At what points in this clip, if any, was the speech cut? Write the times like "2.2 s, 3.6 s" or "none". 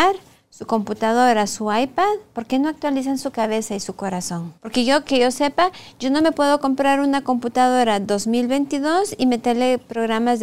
4.6 s